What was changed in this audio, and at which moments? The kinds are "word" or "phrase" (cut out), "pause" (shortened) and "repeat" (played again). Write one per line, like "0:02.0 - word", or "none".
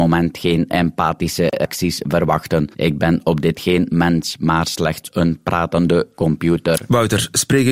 0:02.7 - pause
0:03.5 - word